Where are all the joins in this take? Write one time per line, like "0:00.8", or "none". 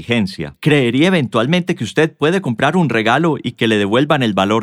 none